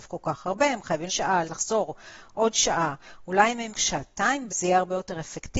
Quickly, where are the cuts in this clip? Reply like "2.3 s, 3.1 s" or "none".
1.1 s, 1.4 s, 3.7 s, 4.5 s